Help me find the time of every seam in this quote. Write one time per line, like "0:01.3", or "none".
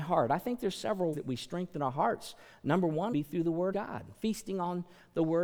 0:01.1
0:03.1
0:03.7